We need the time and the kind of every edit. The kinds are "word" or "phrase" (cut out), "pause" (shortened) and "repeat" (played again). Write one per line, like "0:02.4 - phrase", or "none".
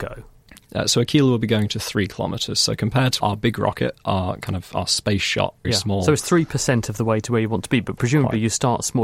0:03.2 - word
0:05.6 - word